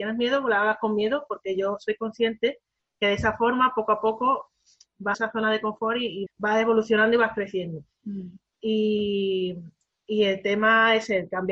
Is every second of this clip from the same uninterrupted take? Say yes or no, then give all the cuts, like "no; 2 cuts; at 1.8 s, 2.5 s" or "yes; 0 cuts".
no; 2 cuts; at 5.1 s, 6.3 s